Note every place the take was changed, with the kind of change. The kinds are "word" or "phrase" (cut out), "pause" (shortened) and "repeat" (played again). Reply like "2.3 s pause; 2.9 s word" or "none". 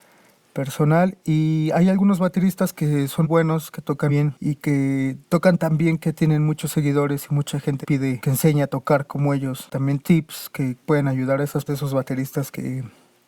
3.2 s word; 4.1 s word; 7.8 s word; 8.2 s word; 10.0 s word; 10.8 s phrase; 11.7 s word

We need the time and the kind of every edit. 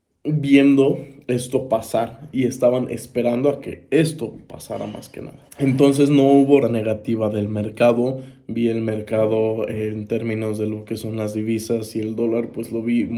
5.5 s pause; 6.6 s phrase

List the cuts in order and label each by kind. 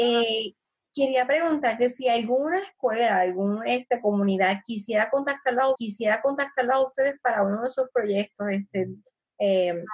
5.7 s repeat

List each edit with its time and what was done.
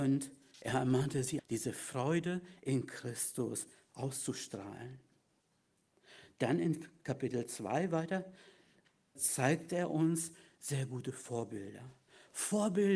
1.4 s word; 9.2 s word

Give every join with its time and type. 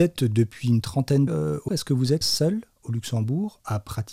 1.3 s word; 1.7 s word; 2.2 s word

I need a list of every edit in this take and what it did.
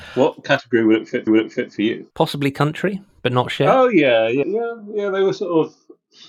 1.3 s repeat; 2.1 s pause; 4.4 s word

